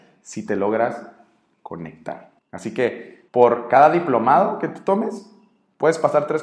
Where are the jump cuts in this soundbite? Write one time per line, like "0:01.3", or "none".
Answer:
0:02.4
0:03.3